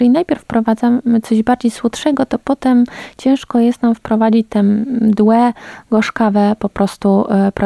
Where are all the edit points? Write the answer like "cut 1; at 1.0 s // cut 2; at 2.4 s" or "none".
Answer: none